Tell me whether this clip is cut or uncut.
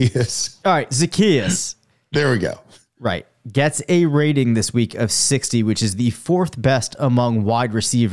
uncut